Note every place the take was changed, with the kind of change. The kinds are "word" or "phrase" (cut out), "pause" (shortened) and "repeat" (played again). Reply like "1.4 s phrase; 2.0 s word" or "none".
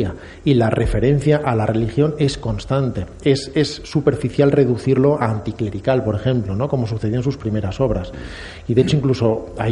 none